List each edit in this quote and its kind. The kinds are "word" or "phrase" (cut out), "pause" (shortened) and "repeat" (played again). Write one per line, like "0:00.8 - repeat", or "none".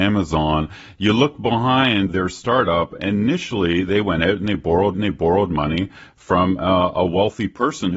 0:02.1 - word
0:03.0 - word
0:04.9 - repeat